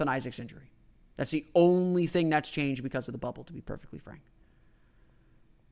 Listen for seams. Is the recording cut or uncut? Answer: uncut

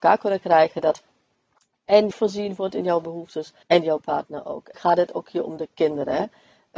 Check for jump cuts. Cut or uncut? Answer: cut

